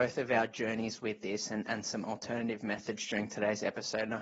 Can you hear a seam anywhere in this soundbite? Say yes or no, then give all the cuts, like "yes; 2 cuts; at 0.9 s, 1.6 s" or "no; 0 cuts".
no; 0 cuts